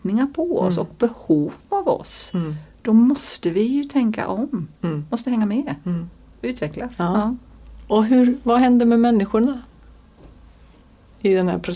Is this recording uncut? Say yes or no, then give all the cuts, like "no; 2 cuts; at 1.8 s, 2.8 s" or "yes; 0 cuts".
yes; 0 cuts